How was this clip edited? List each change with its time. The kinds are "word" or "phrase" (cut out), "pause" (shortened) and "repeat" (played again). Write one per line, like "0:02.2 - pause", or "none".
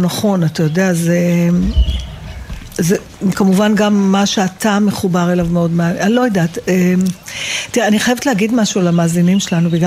none